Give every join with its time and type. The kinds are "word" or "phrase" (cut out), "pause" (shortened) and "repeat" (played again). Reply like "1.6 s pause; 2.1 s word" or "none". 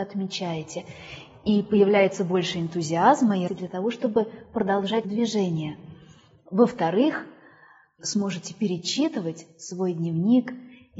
3.5 s word; 5.0 s word; 8.0 s word

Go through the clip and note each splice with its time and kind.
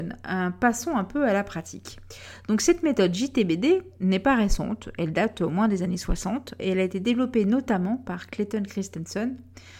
6.6 s word

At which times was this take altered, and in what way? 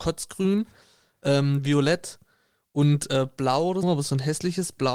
3.8 s word

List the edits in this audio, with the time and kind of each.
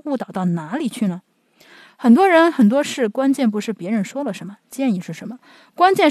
none

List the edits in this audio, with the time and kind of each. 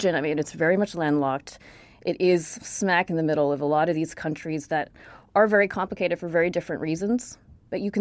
none

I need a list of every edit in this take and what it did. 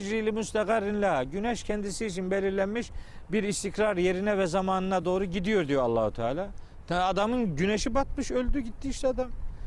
none

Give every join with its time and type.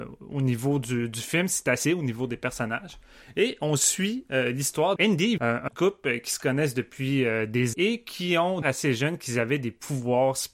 1.8 s word; 5.0 s word; 5.4 s word; 5.7 s word; 7.7 s word; 8.6 s word

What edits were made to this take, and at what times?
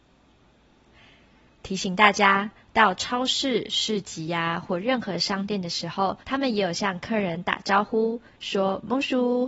6.2 s pause

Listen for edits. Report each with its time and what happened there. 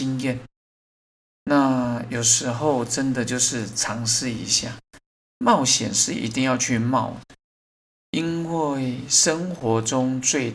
none

